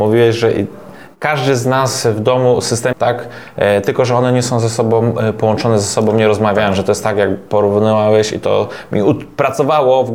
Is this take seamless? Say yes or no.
no